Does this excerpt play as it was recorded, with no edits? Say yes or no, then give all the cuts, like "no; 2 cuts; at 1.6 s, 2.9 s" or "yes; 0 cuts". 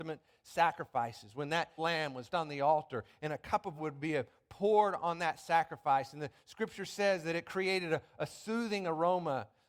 no; 3 cuts; at 1.8 s, 2.3 s, 3.8 s